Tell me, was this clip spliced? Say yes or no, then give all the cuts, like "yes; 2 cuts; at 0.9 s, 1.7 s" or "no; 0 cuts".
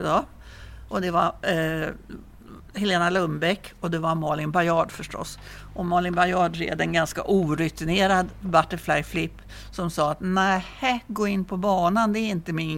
no; 0 cuts